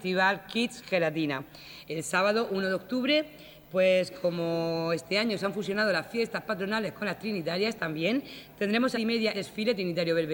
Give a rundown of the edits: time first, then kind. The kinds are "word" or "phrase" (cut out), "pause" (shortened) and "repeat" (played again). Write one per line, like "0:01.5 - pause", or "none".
0:08.9 - phrase
0:09.3 - phrase